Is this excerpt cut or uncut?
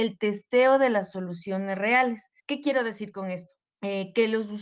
cut